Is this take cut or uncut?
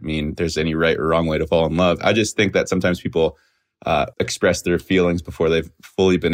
cut